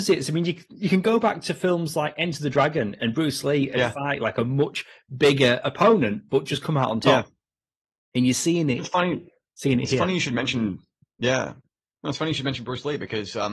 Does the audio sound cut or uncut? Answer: uncut